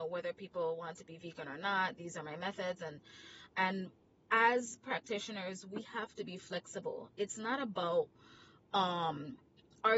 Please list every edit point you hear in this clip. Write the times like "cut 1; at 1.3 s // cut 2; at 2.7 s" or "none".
none